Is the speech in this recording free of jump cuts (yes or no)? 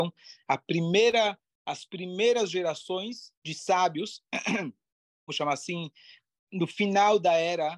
no